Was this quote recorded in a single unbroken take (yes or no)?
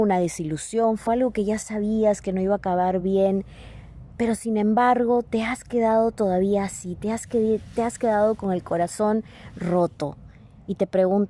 yes